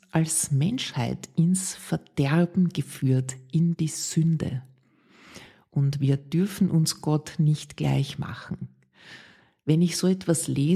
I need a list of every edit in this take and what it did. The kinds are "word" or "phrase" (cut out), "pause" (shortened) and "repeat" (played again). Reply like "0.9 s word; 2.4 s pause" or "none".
none